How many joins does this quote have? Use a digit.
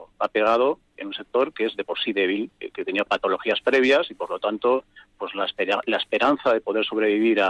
0